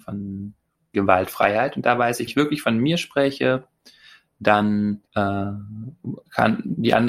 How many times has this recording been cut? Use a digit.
3